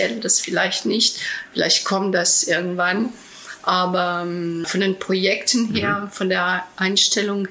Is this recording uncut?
no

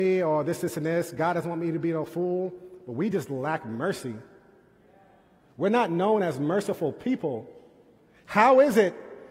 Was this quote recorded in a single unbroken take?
yes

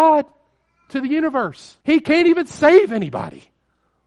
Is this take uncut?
no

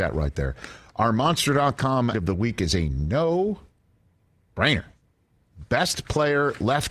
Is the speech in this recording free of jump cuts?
no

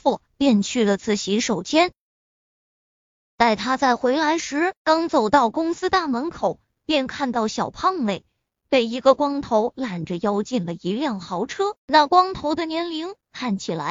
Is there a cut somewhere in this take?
yes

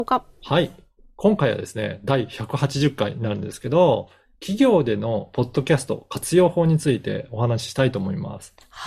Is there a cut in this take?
no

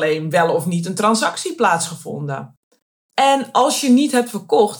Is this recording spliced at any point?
no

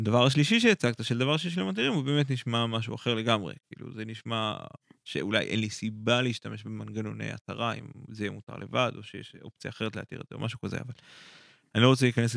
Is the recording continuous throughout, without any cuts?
no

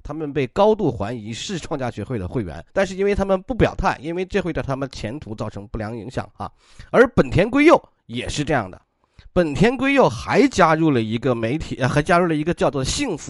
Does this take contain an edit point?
yes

